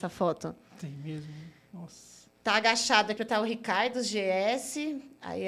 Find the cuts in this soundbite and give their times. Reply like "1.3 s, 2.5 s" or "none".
2.4 s, 3.2 s